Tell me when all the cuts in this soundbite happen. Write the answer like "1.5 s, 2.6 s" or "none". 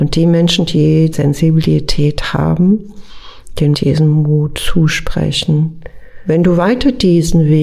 1.1 s, 3.7 s